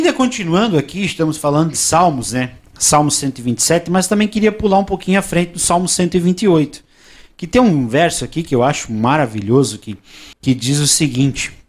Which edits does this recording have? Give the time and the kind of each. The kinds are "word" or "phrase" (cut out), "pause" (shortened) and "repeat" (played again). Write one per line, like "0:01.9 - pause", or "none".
0:10.3 - pause